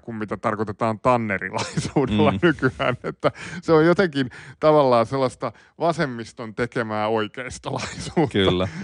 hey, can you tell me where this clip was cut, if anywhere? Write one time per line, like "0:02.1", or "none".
none